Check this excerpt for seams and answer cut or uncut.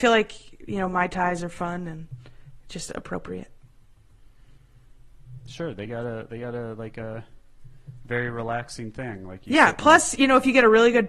uncut